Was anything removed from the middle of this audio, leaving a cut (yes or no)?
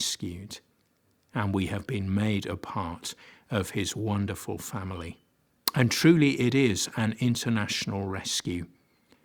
yes